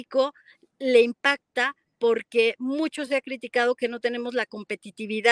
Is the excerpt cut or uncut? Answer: uncut